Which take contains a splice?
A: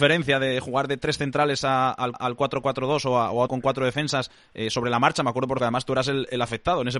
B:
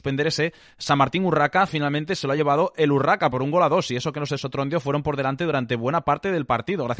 A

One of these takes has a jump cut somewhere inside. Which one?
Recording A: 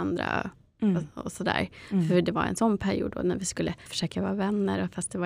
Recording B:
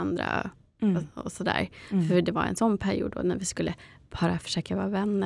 A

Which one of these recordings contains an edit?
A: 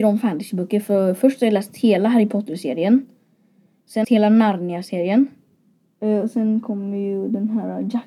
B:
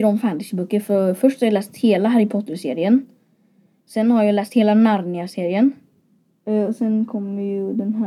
A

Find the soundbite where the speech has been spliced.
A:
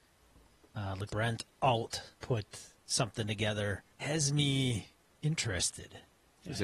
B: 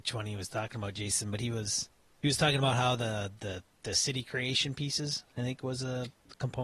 A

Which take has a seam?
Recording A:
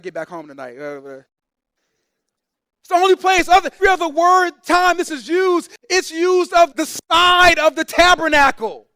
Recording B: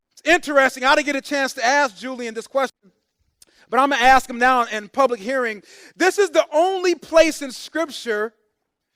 A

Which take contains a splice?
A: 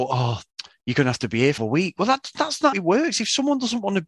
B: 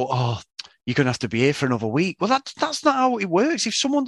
A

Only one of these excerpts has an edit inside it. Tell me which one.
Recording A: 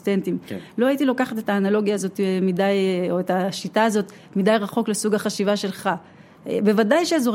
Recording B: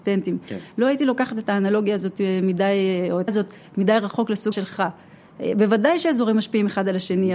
B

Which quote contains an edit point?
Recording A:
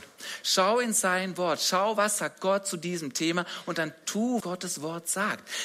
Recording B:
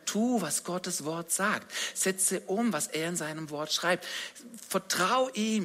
A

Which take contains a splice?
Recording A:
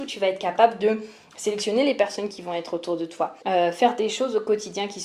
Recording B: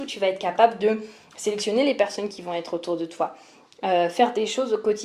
A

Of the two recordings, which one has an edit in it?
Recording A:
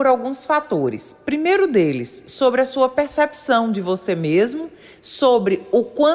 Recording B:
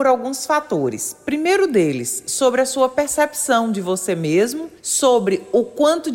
B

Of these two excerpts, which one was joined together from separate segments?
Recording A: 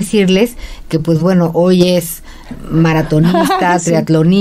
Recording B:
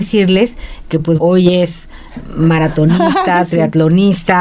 B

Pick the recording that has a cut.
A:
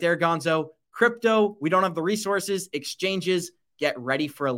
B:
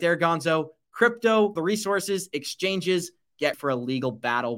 B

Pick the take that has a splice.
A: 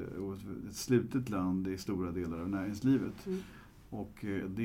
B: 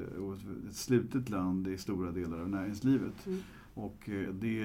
B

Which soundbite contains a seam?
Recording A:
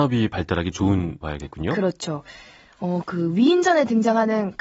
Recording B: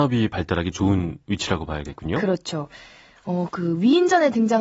A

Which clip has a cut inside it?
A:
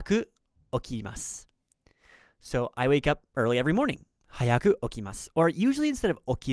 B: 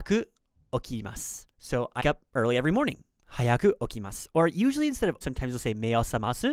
B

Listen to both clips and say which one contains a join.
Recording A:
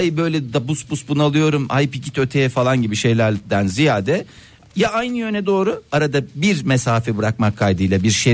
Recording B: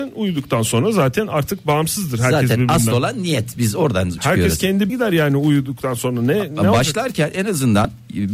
B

